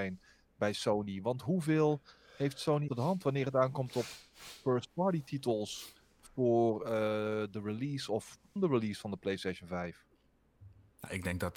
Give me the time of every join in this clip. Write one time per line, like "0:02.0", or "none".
0:02.9
0:08.6

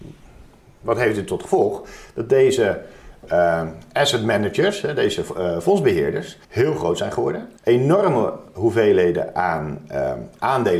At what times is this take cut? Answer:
0:06.4
0:07.6

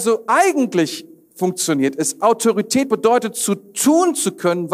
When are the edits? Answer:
none

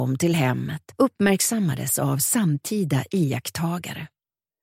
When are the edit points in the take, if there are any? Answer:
0:00.9

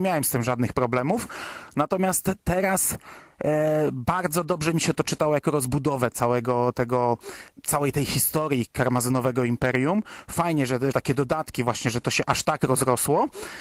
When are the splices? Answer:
0:10.9

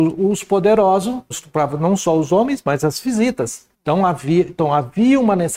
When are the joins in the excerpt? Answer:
0:01.3
0:03.7

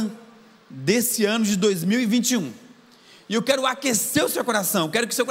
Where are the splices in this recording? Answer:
none

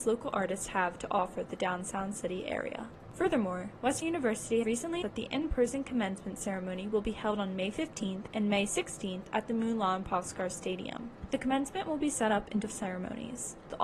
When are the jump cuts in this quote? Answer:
0:04.0
0:04.6
0:05.0
0:12.7

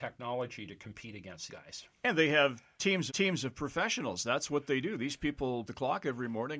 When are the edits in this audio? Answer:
0:01.5
0:03.1
0:05.7

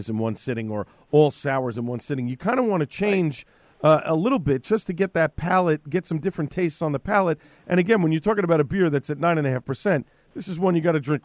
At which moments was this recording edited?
none

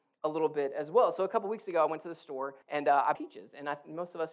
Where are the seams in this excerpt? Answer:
0:02.6
0:03.2

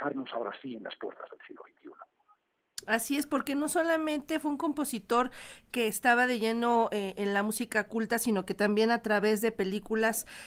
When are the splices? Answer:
none

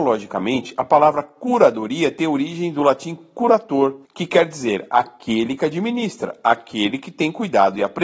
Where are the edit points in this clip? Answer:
0:04.0

